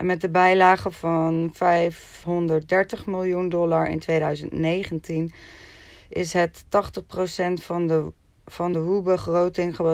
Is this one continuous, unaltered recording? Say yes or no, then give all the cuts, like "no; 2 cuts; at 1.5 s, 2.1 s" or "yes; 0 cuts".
yes; 0 cuts